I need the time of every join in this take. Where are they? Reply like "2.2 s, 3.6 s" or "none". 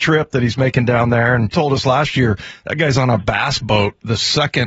1.5 s